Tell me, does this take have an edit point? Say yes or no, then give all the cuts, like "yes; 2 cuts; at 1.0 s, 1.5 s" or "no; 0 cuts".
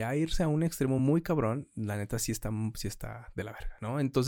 no; 0 cuts